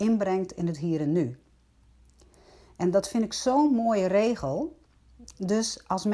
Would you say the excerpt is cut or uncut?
uncut